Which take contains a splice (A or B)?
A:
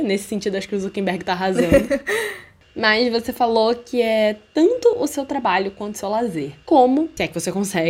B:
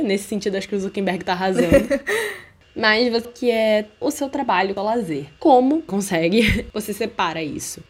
B